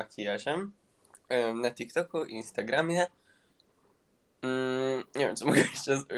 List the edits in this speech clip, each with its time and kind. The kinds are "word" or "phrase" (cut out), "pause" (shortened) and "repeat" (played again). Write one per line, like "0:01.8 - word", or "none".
0:05.1 - pause